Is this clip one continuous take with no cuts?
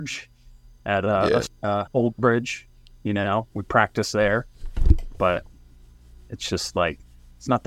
no; 2 cuts; at 1.5 s, 1.9 s

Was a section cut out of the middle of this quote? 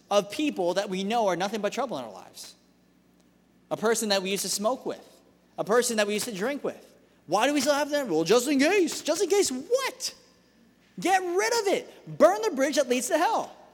no; 0 cuts

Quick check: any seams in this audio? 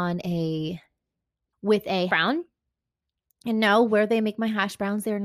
yes; 2 cuts; at 1.5 s, 2.1 s

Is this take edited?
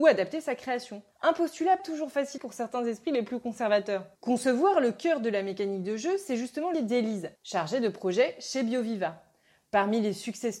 yes; 6 cuts; at 1.1 s, 1.8 s, 2.4 s, 4.2 s, 6.7 s, 7.4 s

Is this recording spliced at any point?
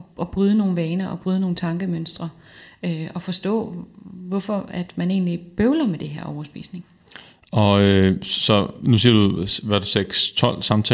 no; 0 cuts

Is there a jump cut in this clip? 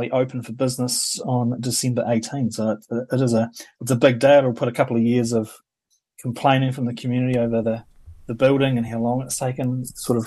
no; 0 cuts

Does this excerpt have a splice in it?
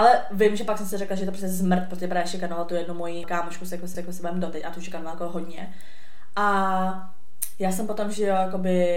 yes; 2 cuts; at 3.2 s, 3.9 s

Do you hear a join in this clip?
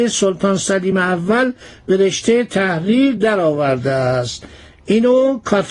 no; 0 cuts

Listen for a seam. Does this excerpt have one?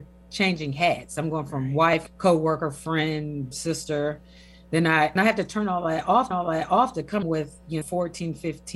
yes; 6 cuts; at 2.1 s, 3.5 s, 5.2 s, 6.3 s, 7.2 s, 7.8 s

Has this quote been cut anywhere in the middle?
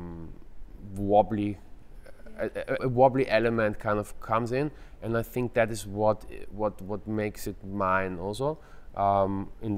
yes; 1 cut; at 2.8 s

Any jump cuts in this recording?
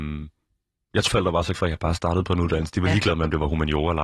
yes; 2 cuts; at 1.1 s, 1.5 s

